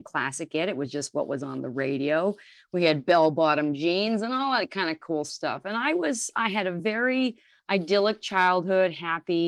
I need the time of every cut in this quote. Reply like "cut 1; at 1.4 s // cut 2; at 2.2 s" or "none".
none